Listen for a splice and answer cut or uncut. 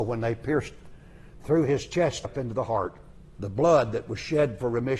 cut